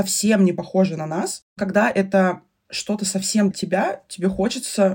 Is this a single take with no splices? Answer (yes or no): no